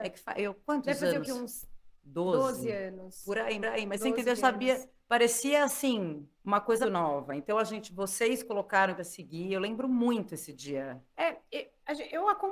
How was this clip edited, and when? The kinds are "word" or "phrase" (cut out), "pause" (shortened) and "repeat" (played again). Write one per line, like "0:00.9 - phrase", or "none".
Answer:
0:03.6 - repeat
0:04.4 - phrase
0:06.4 - pause
0:06.8 - word
0:09.0 - phrase